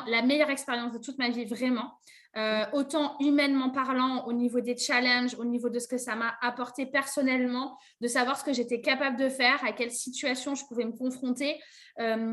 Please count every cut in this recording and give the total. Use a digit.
0